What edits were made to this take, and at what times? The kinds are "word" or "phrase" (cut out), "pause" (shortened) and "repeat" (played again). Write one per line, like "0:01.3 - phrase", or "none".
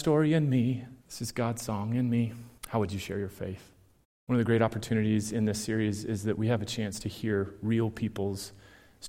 0:01.0 - pause
0:02.6 - pause
0:04.0 - pause

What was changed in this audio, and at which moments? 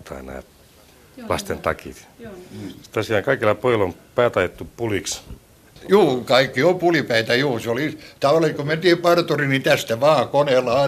none

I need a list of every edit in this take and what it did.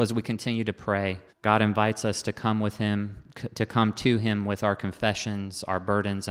0:01.3 - pause

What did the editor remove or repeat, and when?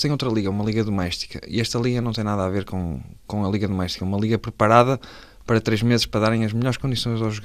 none

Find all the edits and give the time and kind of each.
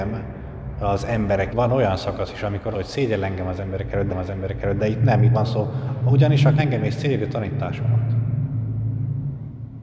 0:01.5 - word
0:02.7 - phrase
0:04.1 - repeat
0:05.3 - word
0:06.6 - word

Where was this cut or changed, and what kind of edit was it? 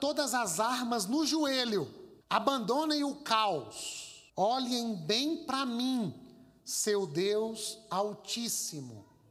0:02.2 - pause
0:04.3 - pause

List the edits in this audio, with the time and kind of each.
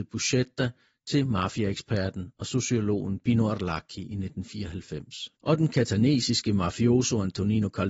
0:05.3 - pause

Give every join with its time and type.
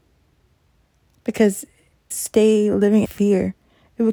0:02.1 - phrase
0:03.0 - word

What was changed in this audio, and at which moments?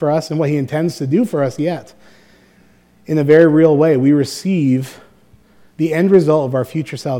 none

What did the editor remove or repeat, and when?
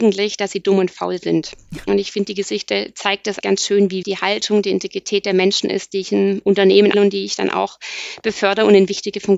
0:03.4 - word
0:04.0 - word
0:06.9 - word

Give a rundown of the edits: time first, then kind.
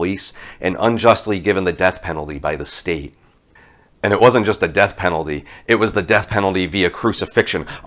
0:03.6 - pause

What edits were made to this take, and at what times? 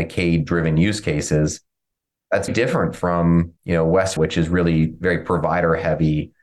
0:02.5 - word
0:03.6 - pause
0:04.2 - word

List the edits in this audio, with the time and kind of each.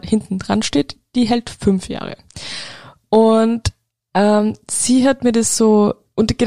none

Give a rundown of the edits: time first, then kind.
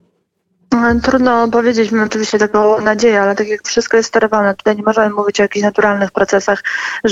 0:02.1 - word
0:03.6 - phrase

